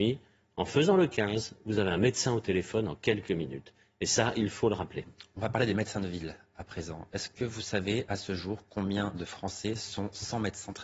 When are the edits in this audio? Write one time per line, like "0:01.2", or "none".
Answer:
none